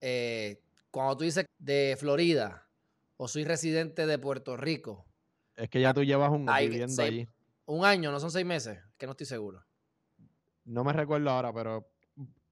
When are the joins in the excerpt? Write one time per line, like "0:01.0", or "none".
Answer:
0:01.5
0:06.5